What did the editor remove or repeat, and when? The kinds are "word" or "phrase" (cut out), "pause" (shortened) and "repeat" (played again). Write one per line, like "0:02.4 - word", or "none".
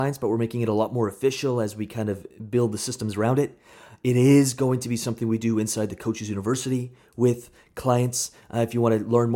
none